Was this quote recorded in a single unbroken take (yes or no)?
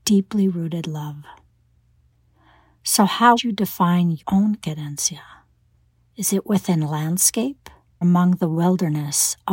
no